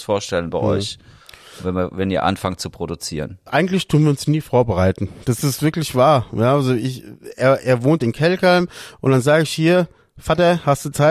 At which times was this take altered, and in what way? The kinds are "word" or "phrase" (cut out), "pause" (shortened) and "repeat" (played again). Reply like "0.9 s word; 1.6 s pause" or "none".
8.0 s phrase